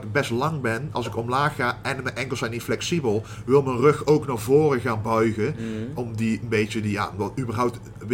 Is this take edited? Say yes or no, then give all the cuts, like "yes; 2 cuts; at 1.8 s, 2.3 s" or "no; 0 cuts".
no; 0 cuts